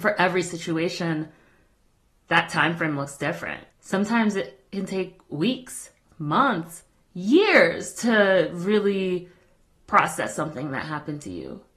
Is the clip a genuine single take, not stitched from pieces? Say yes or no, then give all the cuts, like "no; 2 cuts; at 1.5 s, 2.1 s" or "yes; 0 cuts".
no; 1 cut; at 3.7 s